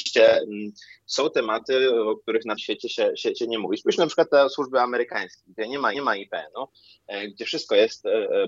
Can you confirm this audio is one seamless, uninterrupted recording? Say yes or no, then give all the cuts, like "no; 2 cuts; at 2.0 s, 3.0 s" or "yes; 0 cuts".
no; 2 cuts; at 2.6 s, 5.9 s